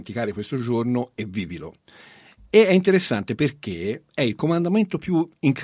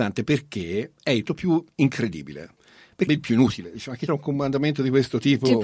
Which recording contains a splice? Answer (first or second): second